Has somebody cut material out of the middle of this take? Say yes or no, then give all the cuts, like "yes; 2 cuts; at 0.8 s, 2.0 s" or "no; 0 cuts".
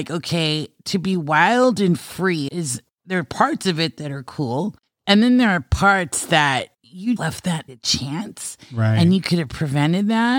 yes; 3 cuts; at 2.5 s, 7.2 s, 7.7 s